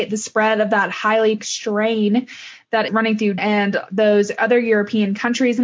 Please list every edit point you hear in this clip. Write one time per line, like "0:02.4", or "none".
0:01.4
0:02.9
0:03.4